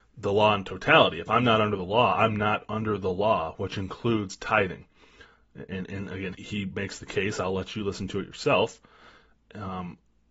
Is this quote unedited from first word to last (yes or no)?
no